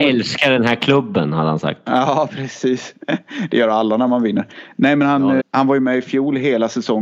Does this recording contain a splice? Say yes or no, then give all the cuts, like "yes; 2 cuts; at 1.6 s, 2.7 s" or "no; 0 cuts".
yes; 1 cut; at 5.4 s